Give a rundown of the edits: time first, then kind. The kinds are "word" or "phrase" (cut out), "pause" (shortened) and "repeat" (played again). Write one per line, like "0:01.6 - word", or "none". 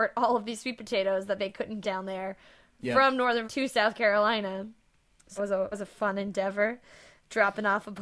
0:01.4 - word
0:01.8 - word
0:03.4 - word
0:05.4 - word
0:05.7 - word